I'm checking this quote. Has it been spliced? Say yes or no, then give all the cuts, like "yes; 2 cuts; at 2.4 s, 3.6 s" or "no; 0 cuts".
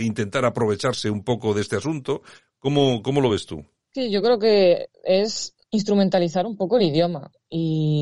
no; 0 cuts